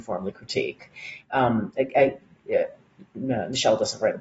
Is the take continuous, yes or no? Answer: yes